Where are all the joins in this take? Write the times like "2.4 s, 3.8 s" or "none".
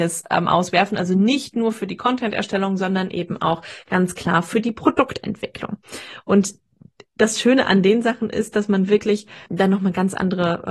9.5 s